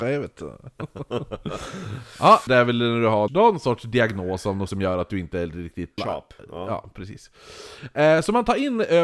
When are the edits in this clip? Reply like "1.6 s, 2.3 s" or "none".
2.5 s, 3.3 s, 4.7 s, 6.0 s